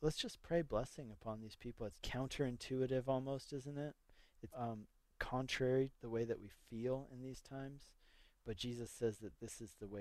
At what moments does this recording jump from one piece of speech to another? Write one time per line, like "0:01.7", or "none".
0:01.9
0:04.5
0:05.9

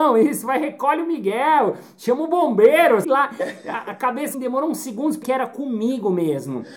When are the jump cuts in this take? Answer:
0:03.0
0:04.3
0:05.2

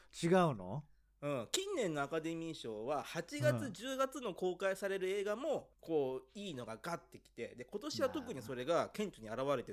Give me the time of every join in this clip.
0:05.7

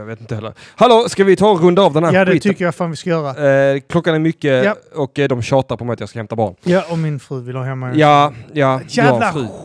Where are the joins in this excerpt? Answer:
none

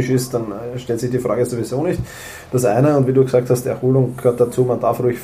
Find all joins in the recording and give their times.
none

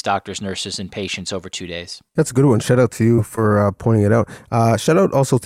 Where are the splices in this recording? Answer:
0:02.1

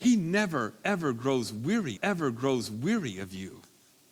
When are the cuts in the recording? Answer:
0:02.0

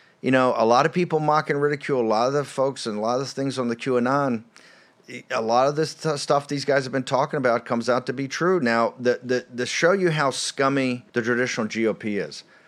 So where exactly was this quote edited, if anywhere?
0:11.1

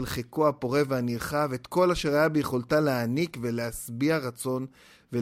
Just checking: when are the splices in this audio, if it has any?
none

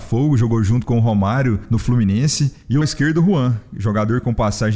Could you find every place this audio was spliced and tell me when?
0:02.8

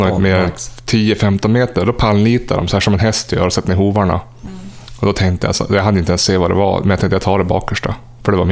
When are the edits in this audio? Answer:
none

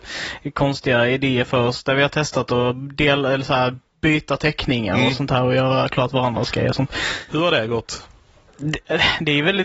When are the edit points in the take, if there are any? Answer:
none

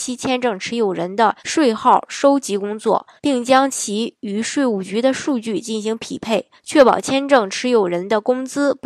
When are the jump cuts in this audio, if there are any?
0:01.4
0:03.2
0:06.6

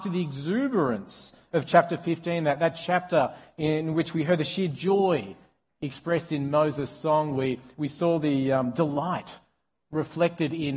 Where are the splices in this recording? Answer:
none

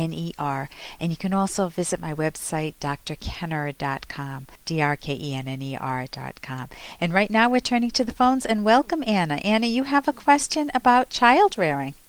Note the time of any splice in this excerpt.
0:04.6

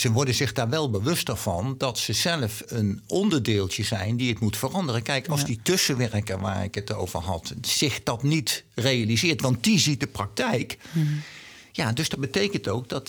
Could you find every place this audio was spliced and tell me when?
0:02.7

